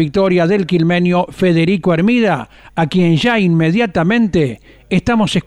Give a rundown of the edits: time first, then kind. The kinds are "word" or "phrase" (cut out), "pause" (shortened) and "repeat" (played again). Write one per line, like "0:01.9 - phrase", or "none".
none